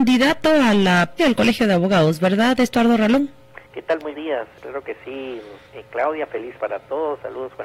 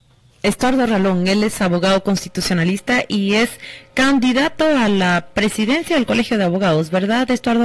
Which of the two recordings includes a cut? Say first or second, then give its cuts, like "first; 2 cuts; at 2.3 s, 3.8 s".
first; 6 cuts; at 1.2 s, 3.6 s, 4.1 s, 4.6 s, 5.7 s, 6.6 s